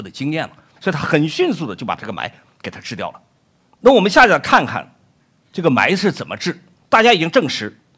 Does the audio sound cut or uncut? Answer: uncut